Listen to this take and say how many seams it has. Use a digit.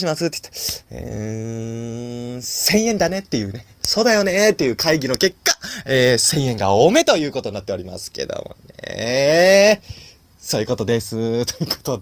0